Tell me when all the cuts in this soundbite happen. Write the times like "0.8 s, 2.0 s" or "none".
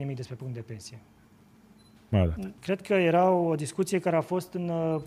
1.2 s, 2.6 s